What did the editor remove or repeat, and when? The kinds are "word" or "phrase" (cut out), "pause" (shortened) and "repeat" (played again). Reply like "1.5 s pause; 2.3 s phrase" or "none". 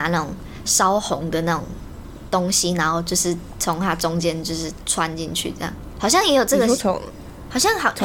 none